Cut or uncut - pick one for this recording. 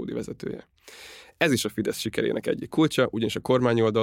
uncut